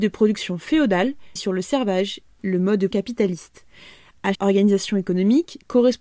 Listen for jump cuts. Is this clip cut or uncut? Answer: cut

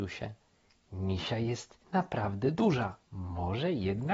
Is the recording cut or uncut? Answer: cut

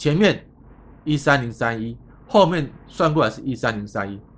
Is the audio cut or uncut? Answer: uncut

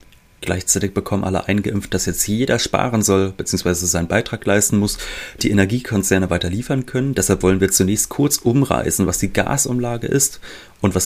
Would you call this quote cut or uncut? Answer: cut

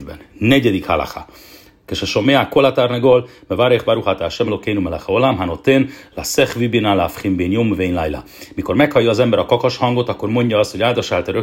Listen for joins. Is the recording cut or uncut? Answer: uncut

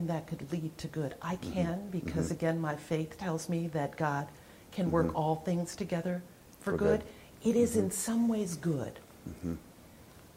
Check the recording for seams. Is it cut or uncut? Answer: uncut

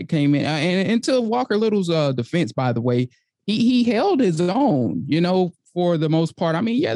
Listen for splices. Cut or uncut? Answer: uncut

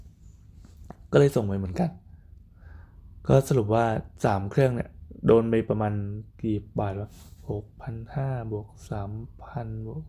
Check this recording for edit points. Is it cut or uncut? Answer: cut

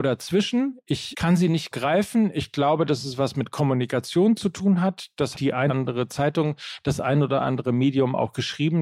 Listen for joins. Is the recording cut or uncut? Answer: cut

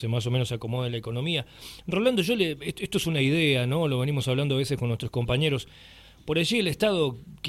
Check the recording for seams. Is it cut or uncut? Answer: uncut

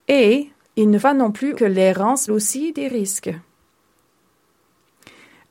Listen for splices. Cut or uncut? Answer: cut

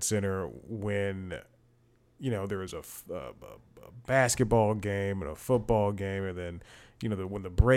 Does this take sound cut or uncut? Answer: uncut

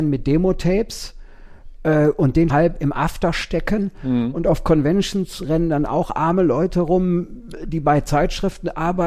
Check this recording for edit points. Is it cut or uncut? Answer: cut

